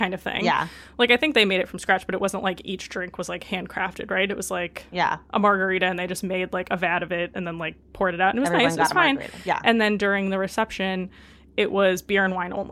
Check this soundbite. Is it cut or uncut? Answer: uncut